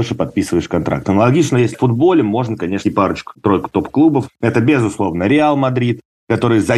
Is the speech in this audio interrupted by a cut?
yes; 2 cuts; at 1.7 s, 2.8 s

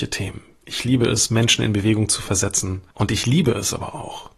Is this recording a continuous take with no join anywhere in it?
no; 1 cut; at 2.9 s

